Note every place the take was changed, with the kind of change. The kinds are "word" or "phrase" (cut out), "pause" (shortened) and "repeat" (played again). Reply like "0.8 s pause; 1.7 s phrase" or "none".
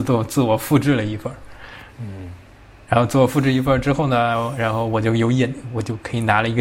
1.9 s pause